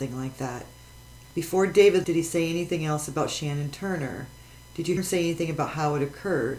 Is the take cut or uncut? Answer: cut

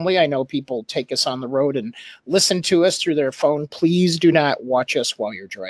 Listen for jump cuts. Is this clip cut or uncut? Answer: uncut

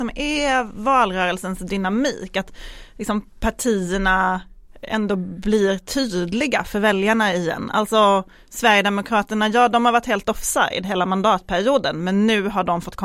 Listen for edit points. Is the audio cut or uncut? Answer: uncut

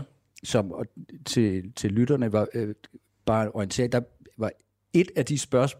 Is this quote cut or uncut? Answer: uncut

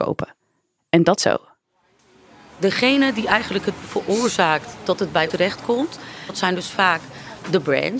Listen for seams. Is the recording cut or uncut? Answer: cut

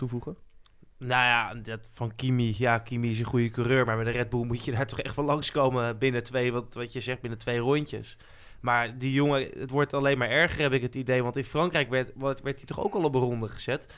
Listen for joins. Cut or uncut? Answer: uncut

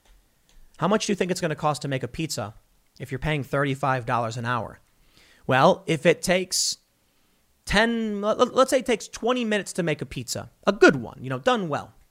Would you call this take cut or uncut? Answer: uncut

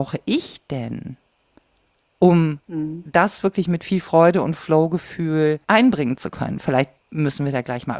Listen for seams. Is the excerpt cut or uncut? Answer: cut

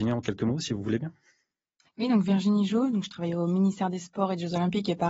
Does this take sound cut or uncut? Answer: uncut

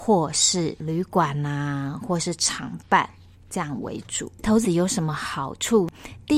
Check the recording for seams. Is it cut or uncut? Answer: cut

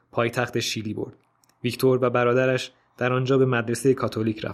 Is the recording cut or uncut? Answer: uncut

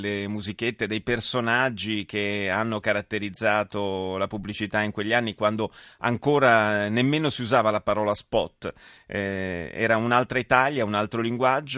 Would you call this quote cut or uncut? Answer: uncut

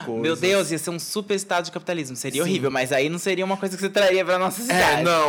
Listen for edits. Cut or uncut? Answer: uncut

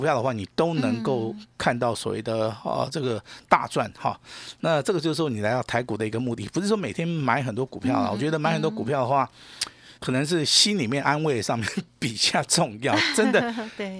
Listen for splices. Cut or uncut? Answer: cut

